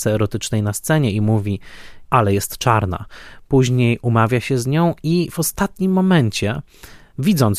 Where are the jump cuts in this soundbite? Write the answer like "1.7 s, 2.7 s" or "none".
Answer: 2.0 s

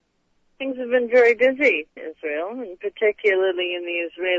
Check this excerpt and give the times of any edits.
2.0 s

